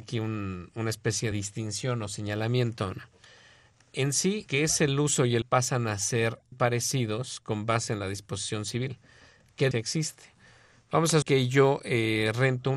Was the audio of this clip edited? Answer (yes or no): yes